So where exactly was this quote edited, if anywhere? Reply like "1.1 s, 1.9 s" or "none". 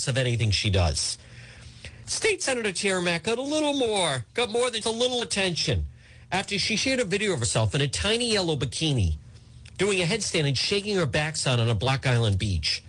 4.3 s, 4.8 s